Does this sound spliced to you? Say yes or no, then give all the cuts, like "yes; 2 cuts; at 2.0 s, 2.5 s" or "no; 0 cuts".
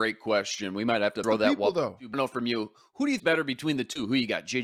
yes; 3 cuts; at 1.2 s, 2.1 s, 3.2 s